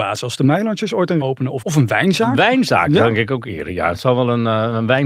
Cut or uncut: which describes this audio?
cut